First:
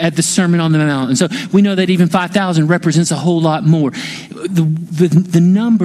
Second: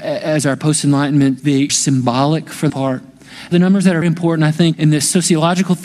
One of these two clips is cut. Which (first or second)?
second